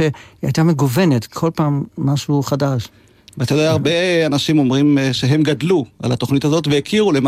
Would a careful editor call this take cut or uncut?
uncut